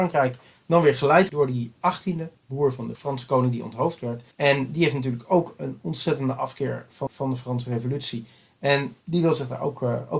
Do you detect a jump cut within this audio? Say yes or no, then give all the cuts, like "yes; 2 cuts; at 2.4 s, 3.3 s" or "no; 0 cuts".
yes; 7 cuts; at 1.3 s, 1.8 s, 2.4 s, 2.9 s, 4.3 s, 7.1 s, 9.0 s